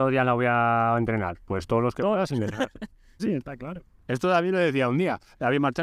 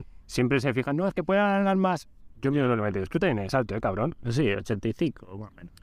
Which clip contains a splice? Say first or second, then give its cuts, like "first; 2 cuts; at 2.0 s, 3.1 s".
first; 1 cut; at 3.2 s